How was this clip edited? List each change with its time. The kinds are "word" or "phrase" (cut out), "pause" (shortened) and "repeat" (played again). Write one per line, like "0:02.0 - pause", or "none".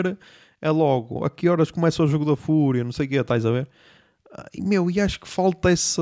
none